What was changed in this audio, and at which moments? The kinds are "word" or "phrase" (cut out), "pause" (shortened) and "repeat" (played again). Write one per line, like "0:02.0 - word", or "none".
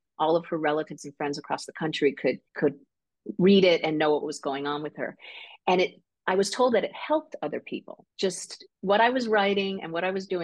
0:02.5 - pause
0:08.1 - pause